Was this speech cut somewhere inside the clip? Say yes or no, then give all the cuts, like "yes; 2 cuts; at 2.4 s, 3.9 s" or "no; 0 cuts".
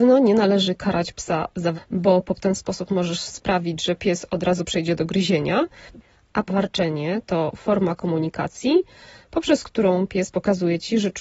yes; 3 cuts; at 1.7 s, 2.4 s, 6.5 s